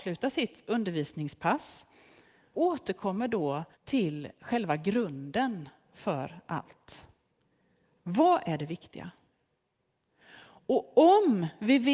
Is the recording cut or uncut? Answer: cut